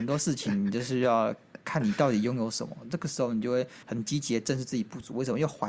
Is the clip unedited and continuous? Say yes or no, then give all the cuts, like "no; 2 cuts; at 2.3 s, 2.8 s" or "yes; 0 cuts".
no; 2 cuts; at 1.6 s, 3.8 s